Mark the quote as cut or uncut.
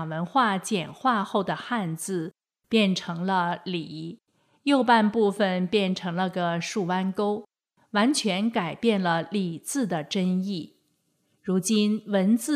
uncut